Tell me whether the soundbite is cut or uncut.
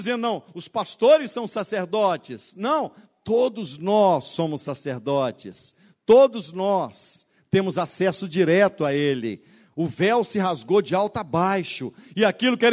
uncut